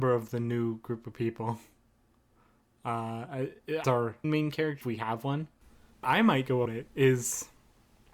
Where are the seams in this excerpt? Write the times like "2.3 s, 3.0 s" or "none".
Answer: 3.8 s, 4.2 s, 4.8 s, 6.0 s, 6.7 s